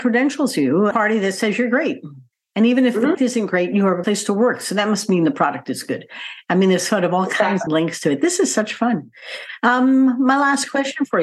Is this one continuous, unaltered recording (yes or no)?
no